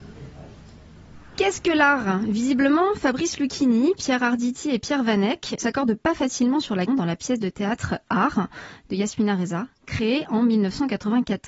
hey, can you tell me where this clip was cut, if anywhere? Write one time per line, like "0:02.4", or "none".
0:05.6
0:06.9

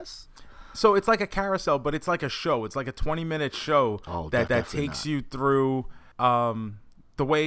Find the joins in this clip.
0:04.5
0:06.1

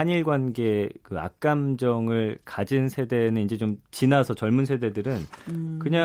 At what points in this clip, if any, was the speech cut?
none

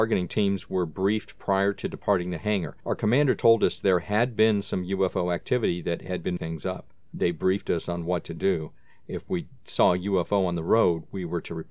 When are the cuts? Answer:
0:06.4

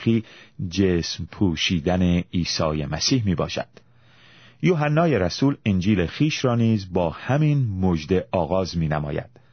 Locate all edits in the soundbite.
none

